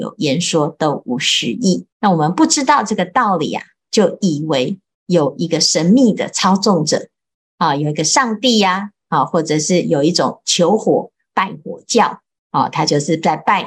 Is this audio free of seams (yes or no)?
no